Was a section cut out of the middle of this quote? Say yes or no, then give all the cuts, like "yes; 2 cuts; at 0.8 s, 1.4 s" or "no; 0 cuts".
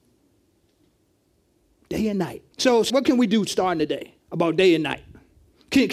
yes; 3 cuts; at 2.5 s, 2.9 s, 4.2 s